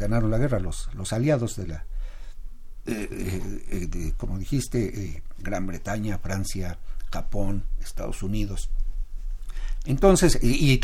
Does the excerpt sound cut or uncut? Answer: uncut